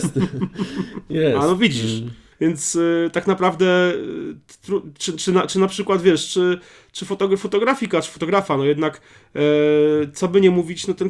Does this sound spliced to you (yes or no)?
no